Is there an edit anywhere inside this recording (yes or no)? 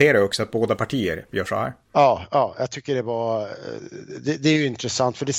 yes